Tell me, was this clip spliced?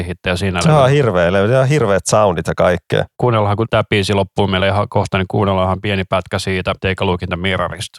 no; 0 cuts

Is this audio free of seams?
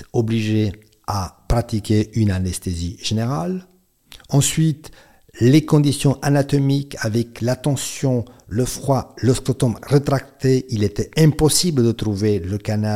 yes; 0 cuts

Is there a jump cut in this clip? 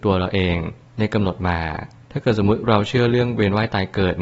no; 0 cuts

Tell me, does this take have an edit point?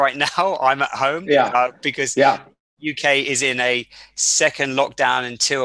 no; 0 cuts

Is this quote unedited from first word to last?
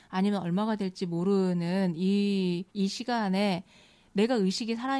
no; 1 cut; at 2.7 s

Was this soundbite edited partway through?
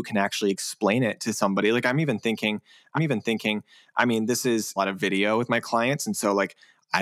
yes; 2 cuts; at 2.9 s, 4.8 s

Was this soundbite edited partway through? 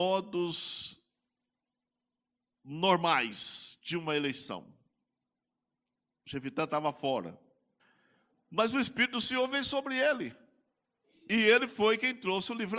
yes; 1 cut; at 7.8 s

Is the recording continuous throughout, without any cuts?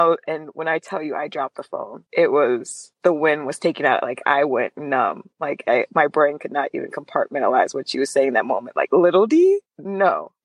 yes; 0 cuts

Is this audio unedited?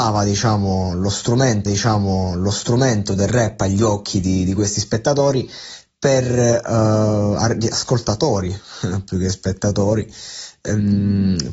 no; 1 cut; at 1.7 s

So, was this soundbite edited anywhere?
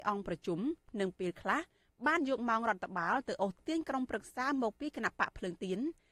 no; 0 cuts

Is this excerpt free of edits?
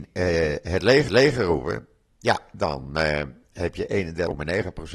no; 1 cut; at 1.1 s

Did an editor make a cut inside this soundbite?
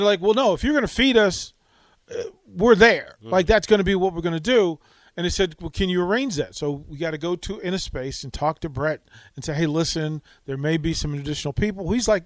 no; 0 cuts

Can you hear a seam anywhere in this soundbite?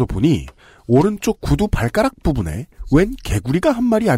no; 0 cuts

